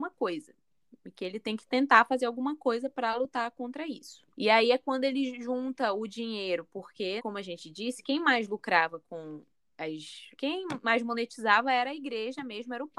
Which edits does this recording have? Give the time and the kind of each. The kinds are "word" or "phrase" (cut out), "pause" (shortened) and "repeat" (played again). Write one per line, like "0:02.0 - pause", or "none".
0:04.3 - pause
0:07.2 - word
0:10.3 - pause